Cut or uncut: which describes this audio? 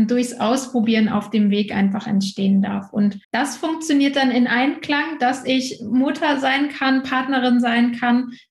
cut